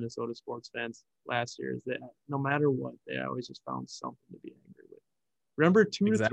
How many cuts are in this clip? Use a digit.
0